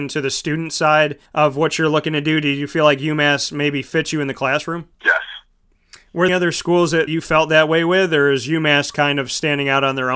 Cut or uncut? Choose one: cut